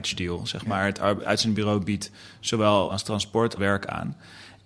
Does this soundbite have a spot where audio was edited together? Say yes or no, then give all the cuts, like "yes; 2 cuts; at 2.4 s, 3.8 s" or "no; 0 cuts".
yes; 3 cuts; at 1.2 s, 2.9 s, 3.6 s